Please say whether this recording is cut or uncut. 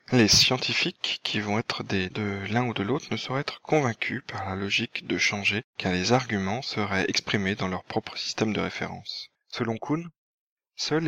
cut